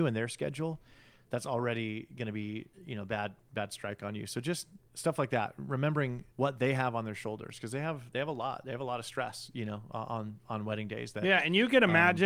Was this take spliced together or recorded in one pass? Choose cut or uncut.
cut